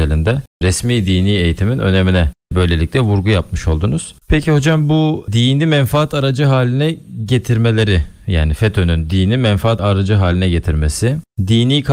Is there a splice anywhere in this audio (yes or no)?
yes